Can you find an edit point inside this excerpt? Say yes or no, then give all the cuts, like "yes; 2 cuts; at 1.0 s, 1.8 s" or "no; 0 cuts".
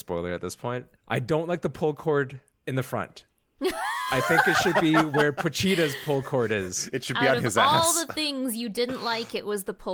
yes; 2 cuts; at 1.0 s, 2.5 s